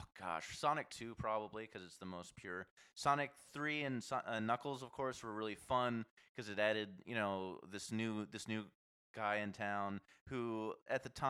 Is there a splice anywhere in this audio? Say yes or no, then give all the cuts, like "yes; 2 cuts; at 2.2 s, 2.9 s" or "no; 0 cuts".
no; 0 cuts